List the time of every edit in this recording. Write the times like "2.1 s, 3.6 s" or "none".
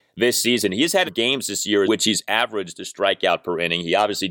1.1 s, 1.9 s